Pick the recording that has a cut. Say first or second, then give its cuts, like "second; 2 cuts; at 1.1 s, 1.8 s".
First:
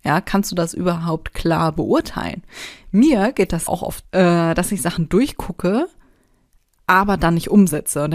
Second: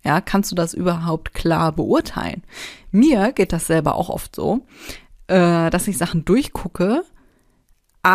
first; 2 cuts; at 3.7 s, 4.0 s